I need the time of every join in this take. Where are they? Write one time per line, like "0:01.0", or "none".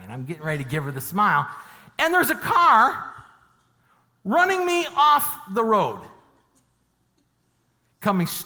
none